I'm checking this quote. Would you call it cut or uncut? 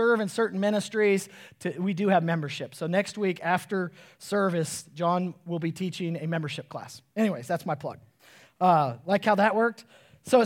uncut